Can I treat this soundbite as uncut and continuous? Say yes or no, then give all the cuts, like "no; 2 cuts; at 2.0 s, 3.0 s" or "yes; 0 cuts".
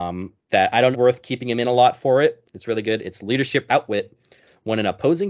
no; 3 cuts; at 0.9 s, 2.4 s, 3.7 s